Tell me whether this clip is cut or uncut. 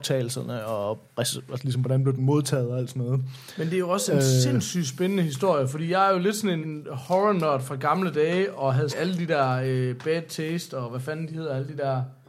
cut